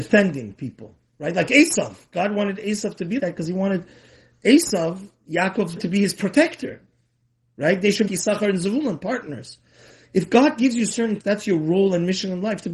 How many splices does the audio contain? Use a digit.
4